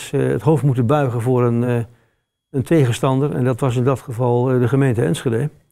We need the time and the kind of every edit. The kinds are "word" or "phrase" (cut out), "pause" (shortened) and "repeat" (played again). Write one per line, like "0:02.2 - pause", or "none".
none